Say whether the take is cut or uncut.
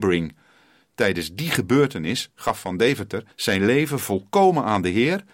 cut